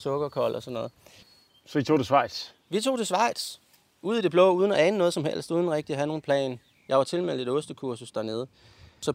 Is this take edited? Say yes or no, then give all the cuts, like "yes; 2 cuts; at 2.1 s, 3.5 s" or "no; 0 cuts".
no; 0 cuts